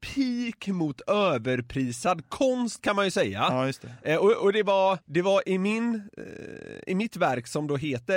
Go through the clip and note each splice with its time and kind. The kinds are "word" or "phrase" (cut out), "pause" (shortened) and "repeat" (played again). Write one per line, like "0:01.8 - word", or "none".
0:05.0 - pause